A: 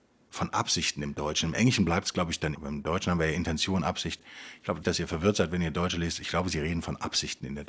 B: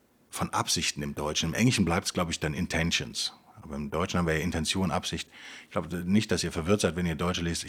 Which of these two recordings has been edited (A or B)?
A